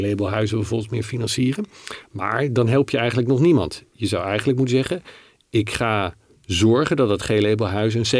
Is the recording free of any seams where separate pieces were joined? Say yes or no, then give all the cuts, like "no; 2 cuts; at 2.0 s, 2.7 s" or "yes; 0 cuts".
yes; 0 cuts